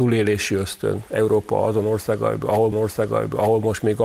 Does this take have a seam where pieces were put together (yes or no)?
yes